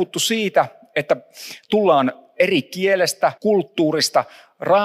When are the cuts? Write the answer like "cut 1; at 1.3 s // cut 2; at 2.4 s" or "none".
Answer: cut 1; at 3.4 s